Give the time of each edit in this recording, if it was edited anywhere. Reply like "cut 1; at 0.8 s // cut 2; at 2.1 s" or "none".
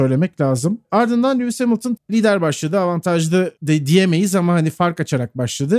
cut 1; at 2.0 s // cut 2; at 3.6 s